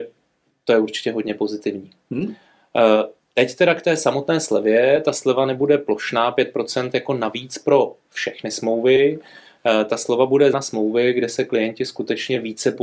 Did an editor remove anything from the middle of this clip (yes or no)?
yes